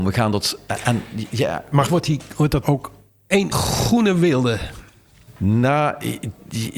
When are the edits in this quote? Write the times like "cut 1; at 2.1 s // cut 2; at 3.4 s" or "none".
cut 1; at 1.9 s // cut 2; at 2.6 s // cut 3; at 3.5 s